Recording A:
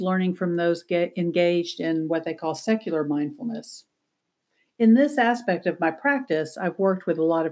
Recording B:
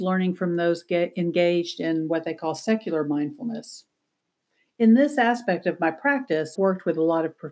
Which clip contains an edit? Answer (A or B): B